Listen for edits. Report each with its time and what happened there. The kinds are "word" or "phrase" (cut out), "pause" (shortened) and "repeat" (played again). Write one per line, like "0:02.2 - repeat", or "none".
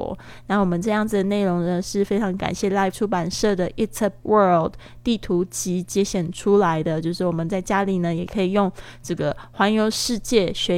0:02.9 - word
0:04.2 - word